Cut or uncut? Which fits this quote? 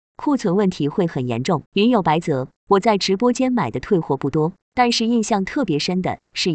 cut